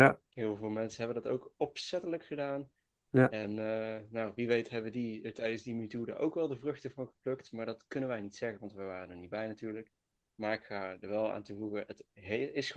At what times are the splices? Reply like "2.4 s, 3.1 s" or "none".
none